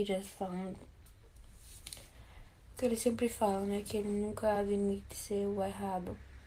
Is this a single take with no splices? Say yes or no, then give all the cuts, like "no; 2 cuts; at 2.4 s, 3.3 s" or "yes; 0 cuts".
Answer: yes; 0 cuts